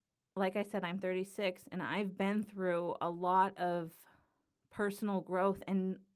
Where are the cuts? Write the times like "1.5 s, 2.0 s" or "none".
none